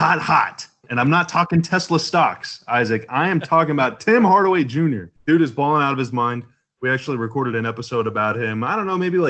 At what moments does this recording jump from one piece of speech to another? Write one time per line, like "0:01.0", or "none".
0:05.2